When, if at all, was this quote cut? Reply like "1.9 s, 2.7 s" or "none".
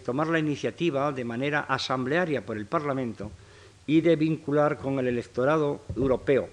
none